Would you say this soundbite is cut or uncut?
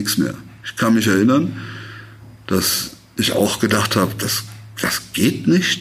uncut